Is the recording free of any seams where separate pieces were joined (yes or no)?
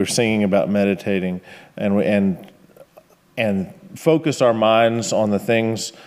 yes